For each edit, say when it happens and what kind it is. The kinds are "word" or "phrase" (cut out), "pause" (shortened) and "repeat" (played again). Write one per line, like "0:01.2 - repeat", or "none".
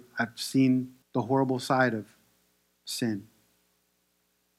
0:01.0 - pause